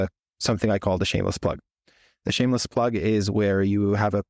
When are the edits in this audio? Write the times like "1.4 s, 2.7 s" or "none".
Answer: none